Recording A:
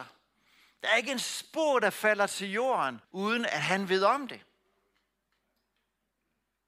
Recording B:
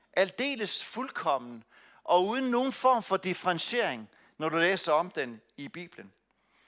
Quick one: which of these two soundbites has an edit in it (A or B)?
A